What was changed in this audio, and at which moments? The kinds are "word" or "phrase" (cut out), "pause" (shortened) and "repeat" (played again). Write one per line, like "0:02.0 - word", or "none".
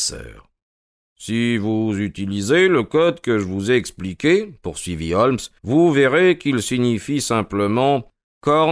0:05.6 - pause